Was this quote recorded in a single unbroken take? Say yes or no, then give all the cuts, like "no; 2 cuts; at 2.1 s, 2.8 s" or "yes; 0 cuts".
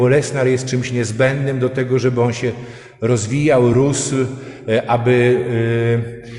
yes; 0 cuts